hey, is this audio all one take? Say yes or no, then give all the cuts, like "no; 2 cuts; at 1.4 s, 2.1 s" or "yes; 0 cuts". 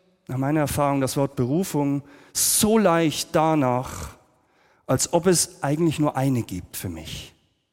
yes; 0 cuts